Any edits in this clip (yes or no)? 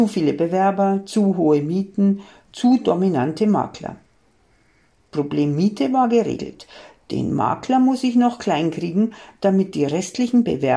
no